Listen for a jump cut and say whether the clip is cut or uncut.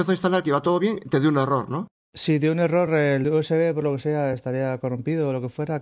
uncut